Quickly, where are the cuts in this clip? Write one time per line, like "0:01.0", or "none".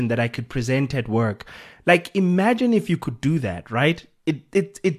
none